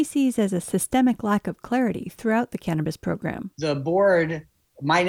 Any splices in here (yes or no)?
yes